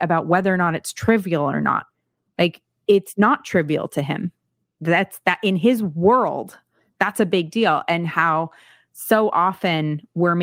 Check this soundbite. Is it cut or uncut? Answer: uncut